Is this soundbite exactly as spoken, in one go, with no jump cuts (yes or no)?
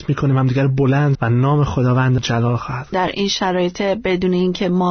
no